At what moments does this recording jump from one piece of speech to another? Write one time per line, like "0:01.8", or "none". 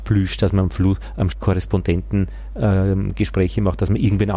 0:01.3